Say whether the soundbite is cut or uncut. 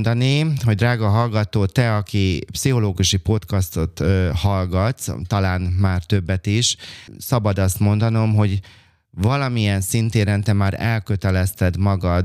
uncut